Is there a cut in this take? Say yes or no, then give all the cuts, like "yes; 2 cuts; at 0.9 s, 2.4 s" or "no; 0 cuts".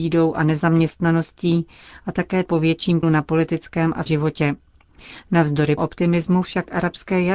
yes; 4 cuts; at 2.5 s, 3.0 s, 4.1 s, 5.8 s